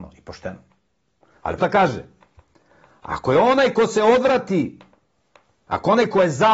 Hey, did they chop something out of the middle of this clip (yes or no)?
yes